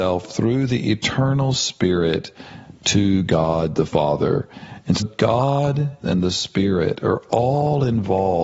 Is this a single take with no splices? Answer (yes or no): no